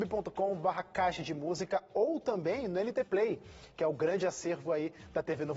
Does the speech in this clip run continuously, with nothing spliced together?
yes; 0 cuts

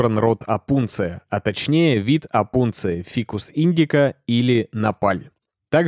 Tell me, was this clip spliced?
no; 0 cuts

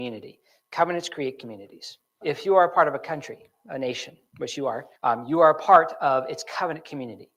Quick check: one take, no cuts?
no; 2 cuts; at 2.2 s, 5.0 s

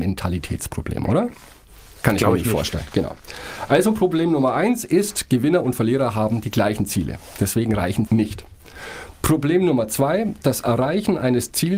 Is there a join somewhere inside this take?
yes; 1 cut; at 8.1 s

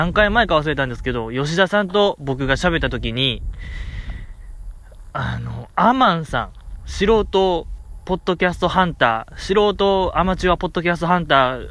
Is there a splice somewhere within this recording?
no; 0 cuts

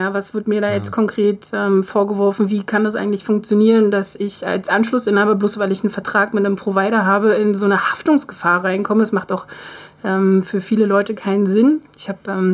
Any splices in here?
no; 0 cuts

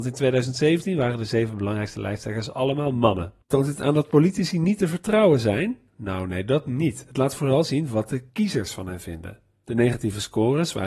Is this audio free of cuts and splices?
no; 1 cut; at 3.4 s

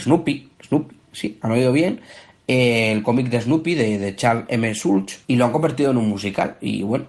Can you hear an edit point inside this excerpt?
yes; 1 cut; at 5.2 s

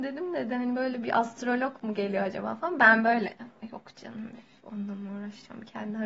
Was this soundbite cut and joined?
no; 0 cuts

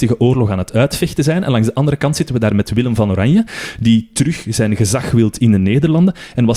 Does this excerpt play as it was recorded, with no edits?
yes; 0 cuts

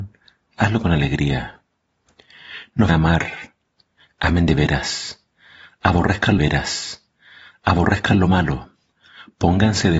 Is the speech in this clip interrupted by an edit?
yes; 2 cuts; at 2.9 s, 6.4 s

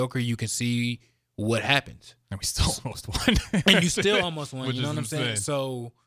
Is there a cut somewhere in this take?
no; 0 cuts

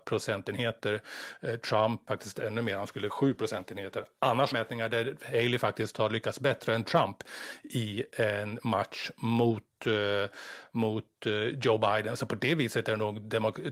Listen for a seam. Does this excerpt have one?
yes; 3 cuts; at 2.1 s, 3.1 s, 4.5 s

